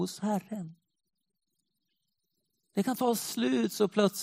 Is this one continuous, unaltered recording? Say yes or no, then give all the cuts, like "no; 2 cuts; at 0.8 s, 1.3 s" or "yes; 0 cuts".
yes; 0 cuts